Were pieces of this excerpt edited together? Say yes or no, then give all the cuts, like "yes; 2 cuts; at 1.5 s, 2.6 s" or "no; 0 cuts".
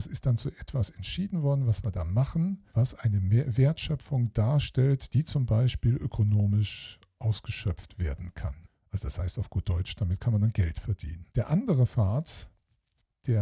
yes; 3 cuts; at 2.7 s, 8.6 s, 11.3 s